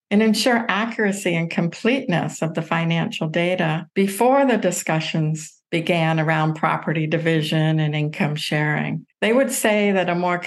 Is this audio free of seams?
no; 3 cuts; at 3.9 s, 5.6 s, 9.1 s

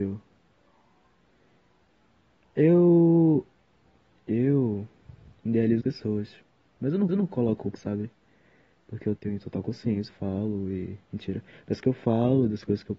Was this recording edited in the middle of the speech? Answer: yes; 7 cuts; at 5.8 s, 7.1 s, 7.8 s, 9.2 s, 10.1 s, 11.0 s, 11.8 s

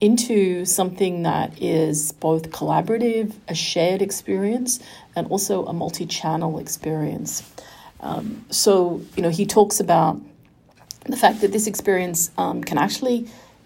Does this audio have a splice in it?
no; 0 cuts

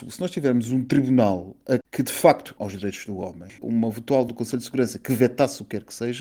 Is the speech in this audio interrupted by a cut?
yes; 4 cuts; at 1.8 s, 2.6 s, 3.6 s, 4.3 s

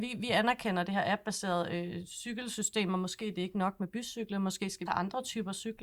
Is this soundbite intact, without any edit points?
no; 1 cut; at 4.9 s

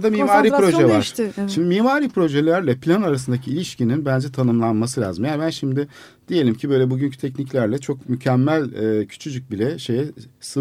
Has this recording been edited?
no; 0 cuts

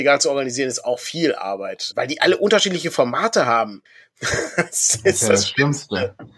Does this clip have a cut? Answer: yes; 2 cuts; at 1.9 s, 3.9 s

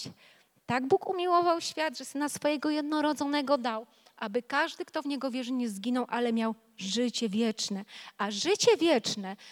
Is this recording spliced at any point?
no; 0 cuts

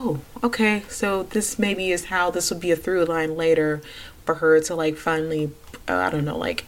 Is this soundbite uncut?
yes; 0 cuts

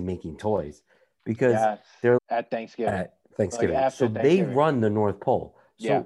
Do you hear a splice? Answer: yes; 2 cuts; at 2.2 s, 3.2 s

